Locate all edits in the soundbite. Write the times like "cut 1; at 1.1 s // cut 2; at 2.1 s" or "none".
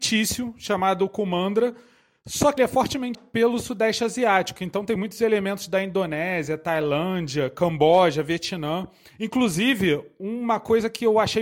cut 1; at 2.6 s // cut 2; at 3.1 s